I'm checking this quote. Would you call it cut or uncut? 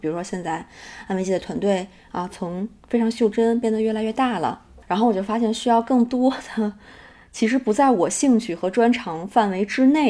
uncut